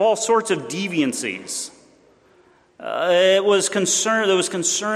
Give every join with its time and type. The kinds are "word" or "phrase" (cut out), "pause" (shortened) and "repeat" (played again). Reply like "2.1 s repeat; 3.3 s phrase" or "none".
none